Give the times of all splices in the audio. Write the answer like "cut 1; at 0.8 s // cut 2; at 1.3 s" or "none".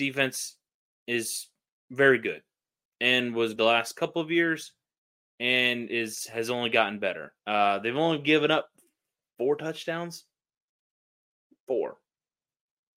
cut 1; at 2.9 s // cut 2; at 3.6 s // cut 3; at 7.4 s